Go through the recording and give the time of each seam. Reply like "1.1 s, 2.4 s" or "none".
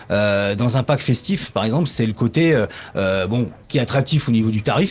3.6 s

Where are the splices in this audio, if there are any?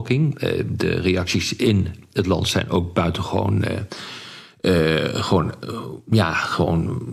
none

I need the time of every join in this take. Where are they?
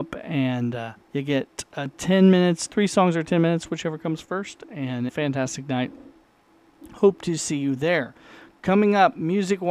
1.0 s, 5.1 s

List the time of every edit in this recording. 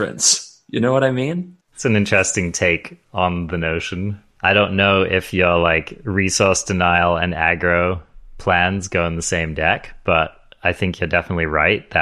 1.6 s

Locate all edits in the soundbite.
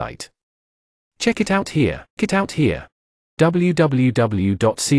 2.2 s

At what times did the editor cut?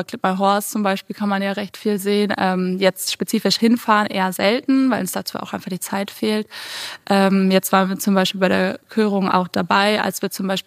none

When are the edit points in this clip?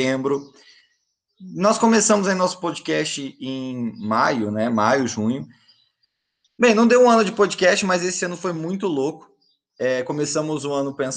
none

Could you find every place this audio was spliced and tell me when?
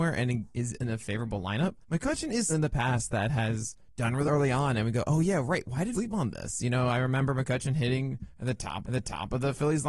1.8 s, 2.5 s, 4.3 s, 5.9 s, 8.8 s

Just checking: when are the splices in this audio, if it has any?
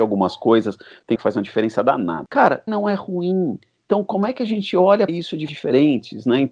1.1 s, 2.7 s, 5.1 s, 5.5 s

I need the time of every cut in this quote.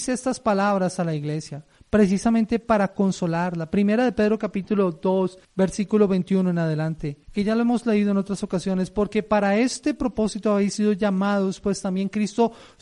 5.4 s, 7.2 s

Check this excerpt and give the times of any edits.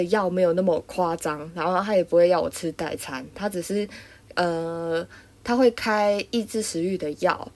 none

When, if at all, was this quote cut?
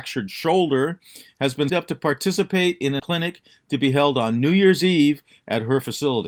1.7 s, 3.0 s

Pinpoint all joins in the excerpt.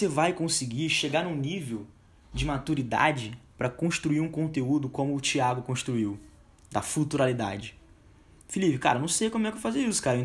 none

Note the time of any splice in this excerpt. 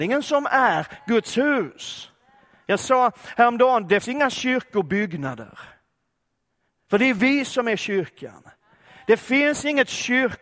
4.0 s

